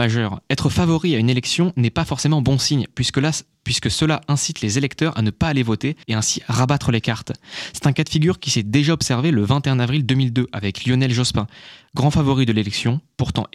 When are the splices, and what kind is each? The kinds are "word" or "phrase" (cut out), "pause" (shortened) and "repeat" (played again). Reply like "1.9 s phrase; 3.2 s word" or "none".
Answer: 6.0 s pause